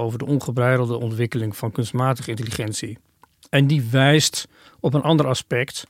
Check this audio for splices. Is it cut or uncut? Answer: uncut